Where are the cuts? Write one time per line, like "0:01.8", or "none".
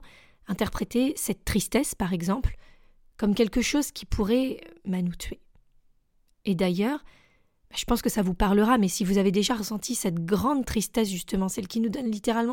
none